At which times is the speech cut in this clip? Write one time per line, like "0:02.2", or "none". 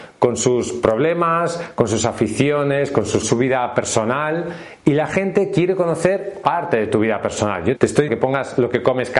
0:03.2
0:06.4
0:07.8
0:08.1